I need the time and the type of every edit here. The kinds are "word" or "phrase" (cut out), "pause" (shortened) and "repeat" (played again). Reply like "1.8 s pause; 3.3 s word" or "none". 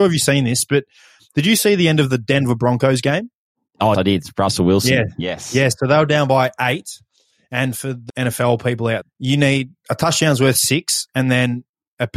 3.9 s word; 8.1 s word; 9.0 s word